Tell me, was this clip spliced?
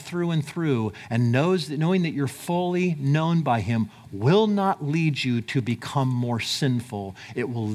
no; 0 cuts

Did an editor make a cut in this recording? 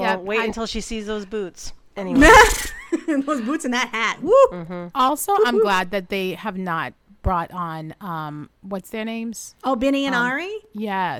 yes; 1 cut; at 8.5 s

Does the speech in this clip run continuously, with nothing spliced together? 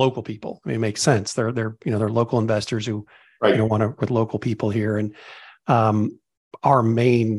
no; 1 cut; at 4.0 s

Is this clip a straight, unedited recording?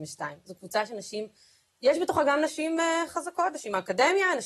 yes; 0 cuts

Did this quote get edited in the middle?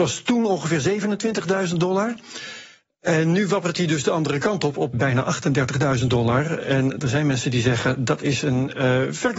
yes; 1 cut; at 4.9 s

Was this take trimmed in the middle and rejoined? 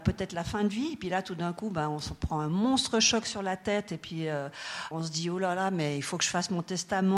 yes; 1 cut; at 4.9 s

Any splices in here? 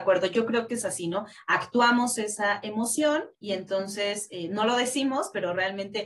yes; 1 cut; at 3.3 s

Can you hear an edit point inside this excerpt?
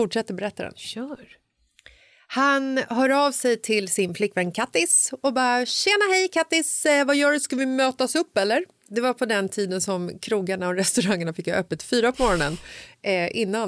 no; 0 cuts

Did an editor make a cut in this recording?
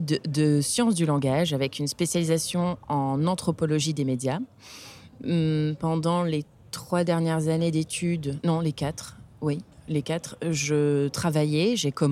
no; 0 cuts

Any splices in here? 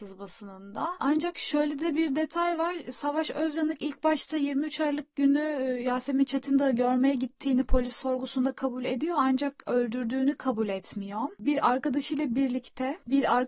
no; 0 cuts

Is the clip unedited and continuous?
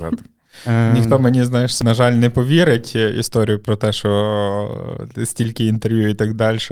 yes; 0 cuts

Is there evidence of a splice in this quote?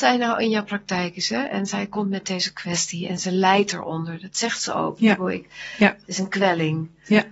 yes; 1 cut; at 3.2 s

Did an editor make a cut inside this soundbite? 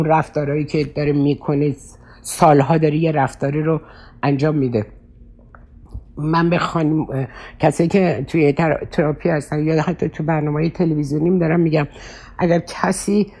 no; 0 cuts

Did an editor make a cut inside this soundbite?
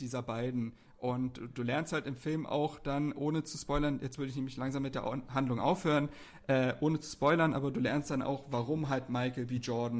no; 0 cuts

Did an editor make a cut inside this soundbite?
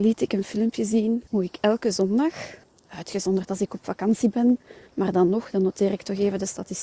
yes; 3 cuts; at 1.3 s, 2.6 s, 4.9 s

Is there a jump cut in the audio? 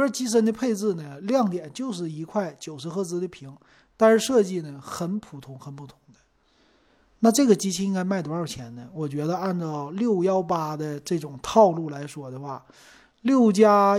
no; 0 cuts

